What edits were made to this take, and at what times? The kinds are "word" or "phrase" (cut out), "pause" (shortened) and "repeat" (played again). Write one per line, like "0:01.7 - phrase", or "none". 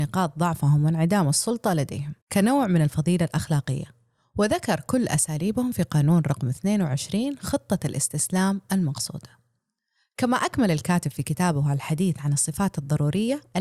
0:02.2 - pause